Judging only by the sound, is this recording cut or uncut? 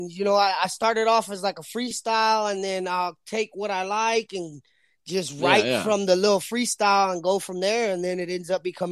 uncut